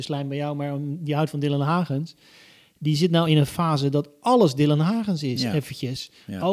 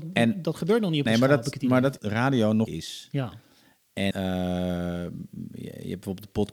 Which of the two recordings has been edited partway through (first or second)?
second